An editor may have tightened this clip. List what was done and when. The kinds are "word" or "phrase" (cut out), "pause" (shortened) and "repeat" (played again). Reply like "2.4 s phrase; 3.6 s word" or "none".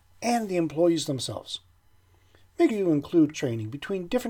2.7 s word; 3.3 s word